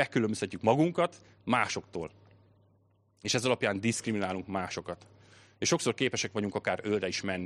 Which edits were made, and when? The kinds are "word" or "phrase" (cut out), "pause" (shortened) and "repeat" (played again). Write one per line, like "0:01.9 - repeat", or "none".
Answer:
none